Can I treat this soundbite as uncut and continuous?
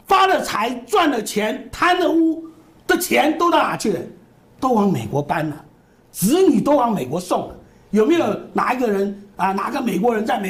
yes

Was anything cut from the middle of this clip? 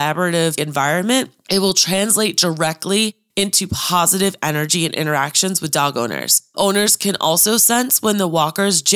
no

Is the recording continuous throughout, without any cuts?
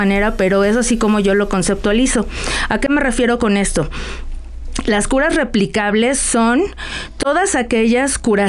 yes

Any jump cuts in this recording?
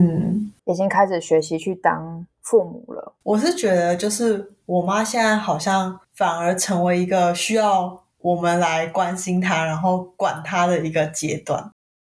yes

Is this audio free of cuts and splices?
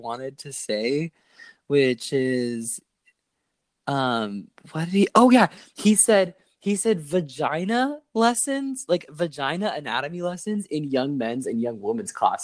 yes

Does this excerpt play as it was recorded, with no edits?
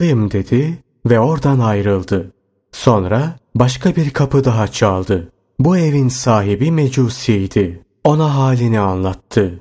yes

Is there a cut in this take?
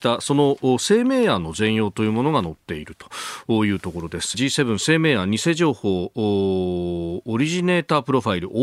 yes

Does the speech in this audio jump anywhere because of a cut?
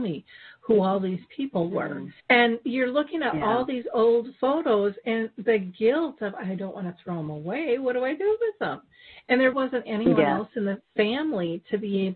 yes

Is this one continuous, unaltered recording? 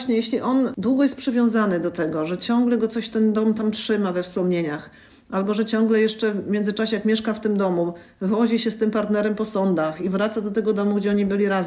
yes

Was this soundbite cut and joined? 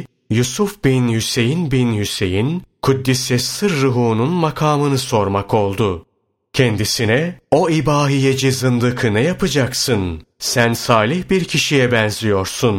yes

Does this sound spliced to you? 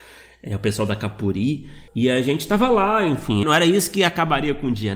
yes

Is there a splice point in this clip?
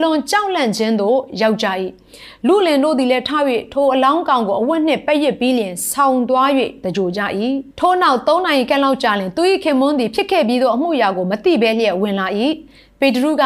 yes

